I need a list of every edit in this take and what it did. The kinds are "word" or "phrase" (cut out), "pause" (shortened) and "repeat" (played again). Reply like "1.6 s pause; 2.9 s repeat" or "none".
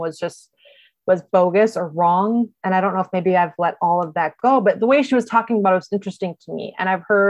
none